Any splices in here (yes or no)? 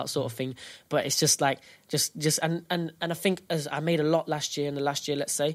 no